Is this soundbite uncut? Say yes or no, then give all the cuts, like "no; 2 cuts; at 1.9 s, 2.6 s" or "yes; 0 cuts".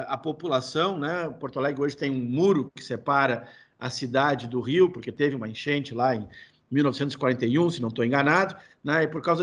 yes; 0 cuts